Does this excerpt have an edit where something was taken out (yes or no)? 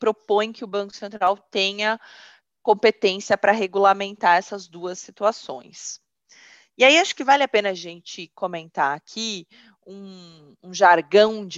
no